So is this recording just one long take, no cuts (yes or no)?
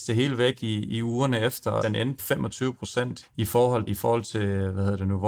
no